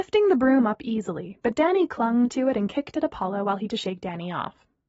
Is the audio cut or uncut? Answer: cut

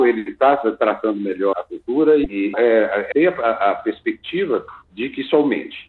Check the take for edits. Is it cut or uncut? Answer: cut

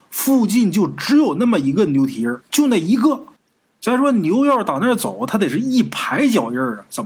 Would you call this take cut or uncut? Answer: cut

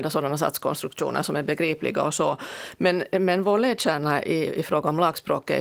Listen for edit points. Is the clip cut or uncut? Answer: uncut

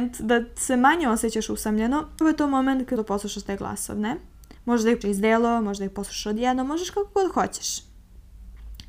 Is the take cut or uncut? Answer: cut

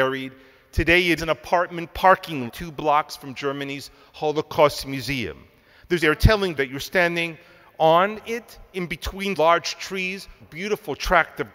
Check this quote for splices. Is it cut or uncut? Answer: cut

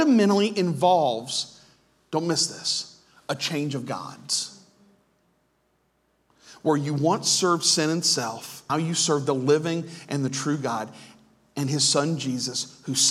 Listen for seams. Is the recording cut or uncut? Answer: cut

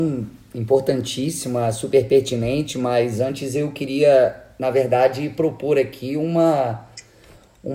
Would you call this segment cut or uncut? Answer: uncut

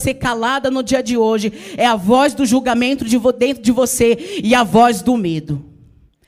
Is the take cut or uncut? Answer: uncut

